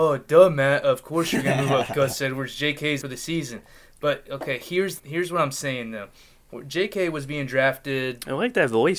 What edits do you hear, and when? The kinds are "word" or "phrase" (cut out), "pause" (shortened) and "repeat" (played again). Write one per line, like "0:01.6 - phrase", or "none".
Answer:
0:03.0 - word
0:05.0 - word